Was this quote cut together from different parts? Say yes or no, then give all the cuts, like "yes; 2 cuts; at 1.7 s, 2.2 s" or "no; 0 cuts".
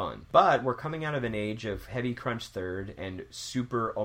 no; 0 cuts